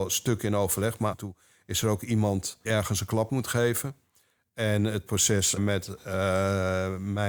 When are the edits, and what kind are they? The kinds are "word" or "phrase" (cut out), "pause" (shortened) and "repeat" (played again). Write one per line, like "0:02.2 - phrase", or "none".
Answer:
0:01.1 - word
0:02.6 - word
0:03.3 - word
0:05.6 - word